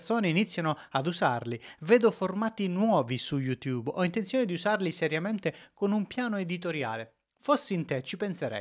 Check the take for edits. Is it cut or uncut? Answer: uncut